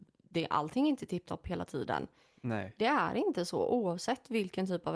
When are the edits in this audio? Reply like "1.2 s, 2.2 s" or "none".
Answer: none